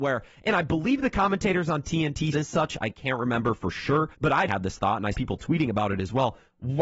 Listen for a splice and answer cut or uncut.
cut